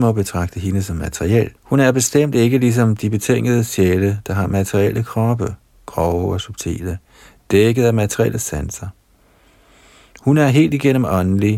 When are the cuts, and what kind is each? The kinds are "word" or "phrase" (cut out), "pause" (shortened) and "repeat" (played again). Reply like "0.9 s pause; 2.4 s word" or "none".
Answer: 1.6 s pause